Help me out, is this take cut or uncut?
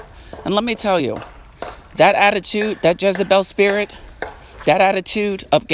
uncut